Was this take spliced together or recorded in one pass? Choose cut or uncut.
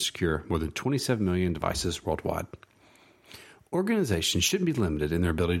uncut